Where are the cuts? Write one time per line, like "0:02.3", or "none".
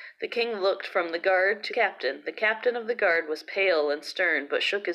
0:01.7

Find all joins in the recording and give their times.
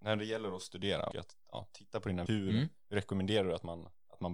0:01.1
0:02.3

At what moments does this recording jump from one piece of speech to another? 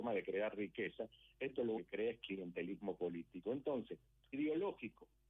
0:01.8
0:04.3

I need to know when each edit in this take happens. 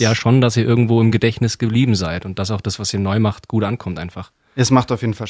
none

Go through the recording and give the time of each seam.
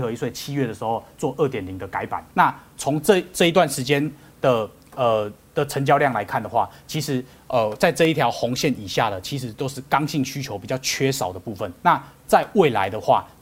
0:02.3
0:11.8

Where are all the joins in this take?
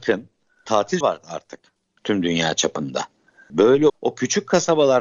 0:01.0
0:02.0
0:03.9

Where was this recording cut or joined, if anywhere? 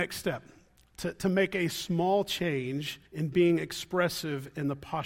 0:03.1

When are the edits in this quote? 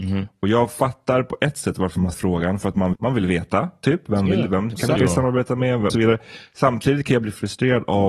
0:02.1
0:02.9
0:05.0
0:05.9

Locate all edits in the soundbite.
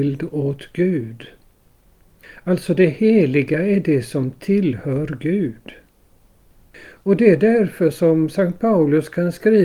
none

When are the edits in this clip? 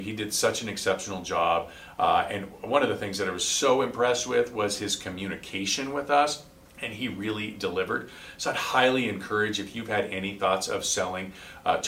0:06.7

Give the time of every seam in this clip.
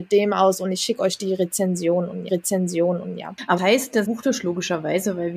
0:02.3
0:03.6
0:04.0

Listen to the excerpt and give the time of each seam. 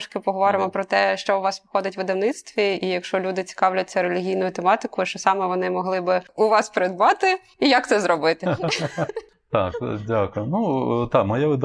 none

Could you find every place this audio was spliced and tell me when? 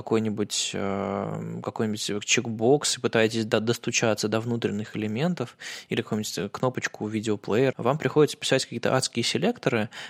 0:07.7

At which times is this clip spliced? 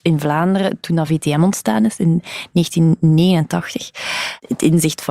none

